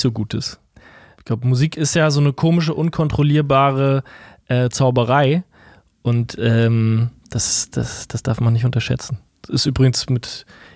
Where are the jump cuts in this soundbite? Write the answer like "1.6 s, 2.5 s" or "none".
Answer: none